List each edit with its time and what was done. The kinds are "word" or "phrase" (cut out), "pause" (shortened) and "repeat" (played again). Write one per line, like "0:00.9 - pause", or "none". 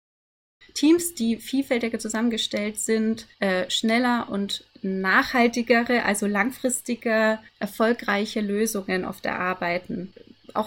0:03.3 - pause
0:04.7 - pause
0:07.5 - pause